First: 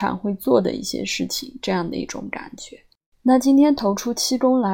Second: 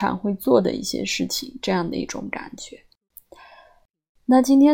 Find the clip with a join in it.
first; 1 cut; at 3.0 s

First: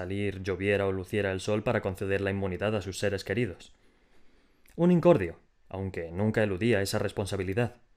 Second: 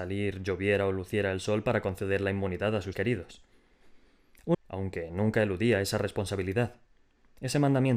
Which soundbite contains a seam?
second; 2 cuts; at 2.9 s, 4.5 s

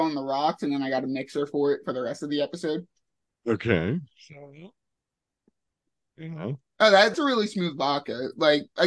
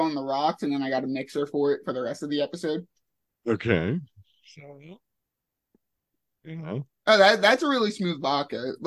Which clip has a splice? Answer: first; 2 cuts; at 4.1 s, 7.1 s

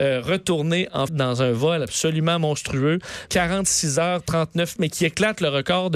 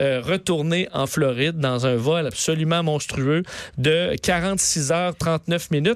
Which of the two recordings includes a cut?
first; 3 cuts; at 1.1 s, 3.3 s, 4.8 s

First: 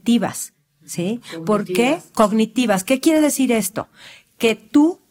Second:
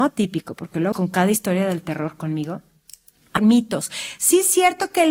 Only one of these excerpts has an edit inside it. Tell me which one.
second; 2 cuts; at 0.9 s, 3.4 s

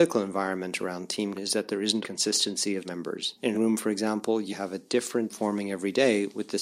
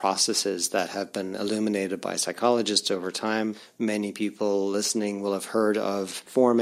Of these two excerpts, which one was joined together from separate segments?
first; 6 cuts; at 1.3 s, 2.0 s, 2.8 s, 3.5 s, 4.5 s, 5.3 s

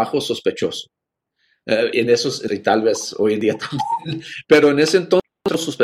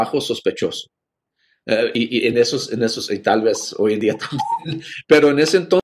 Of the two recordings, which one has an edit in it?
first; 2 cuts; at 1.9 s, 2.5 s

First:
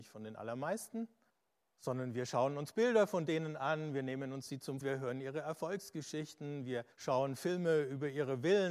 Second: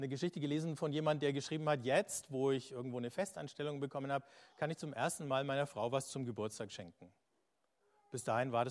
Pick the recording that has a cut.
first; 3 cuts; at 1.3 s, 4.8 s, 6.9 s

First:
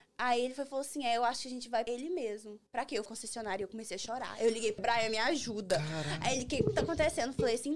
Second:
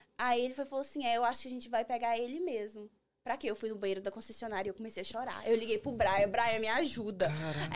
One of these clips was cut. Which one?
first; 4 cuts; at 1.9 s, 2.7 s, 3.1 s, 4.8 s

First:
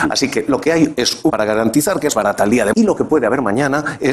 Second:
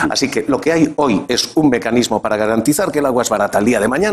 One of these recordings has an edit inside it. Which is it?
first; 4 cuts; at 1.0 s, 1.3 s, 2.1 s, 2.7 s

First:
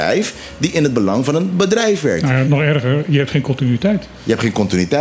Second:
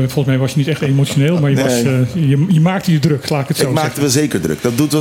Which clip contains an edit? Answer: first; 1 cut; at 2.4 s

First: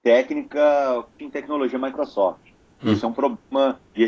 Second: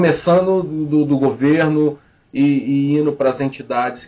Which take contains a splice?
first; 1 cut; at 1.2 s

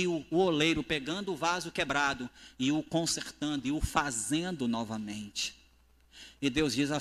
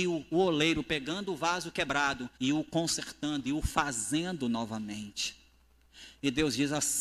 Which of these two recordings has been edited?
second; 1 cut; at 2.3 s

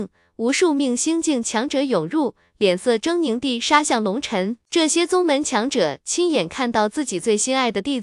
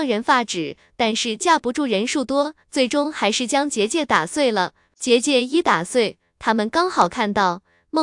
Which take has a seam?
second; 1 cut; at 2.6 s

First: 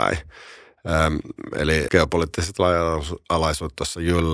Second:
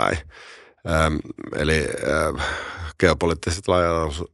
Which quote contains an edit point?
first; 1 cut; at 1.9 s

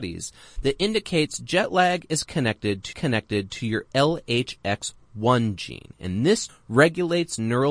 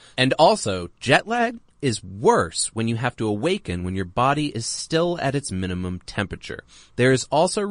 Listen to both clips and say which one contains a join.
first; 2 cuts; at 2.9 s, 6.5 s

